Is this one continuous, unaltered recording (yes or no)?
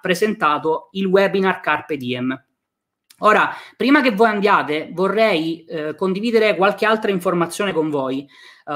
yes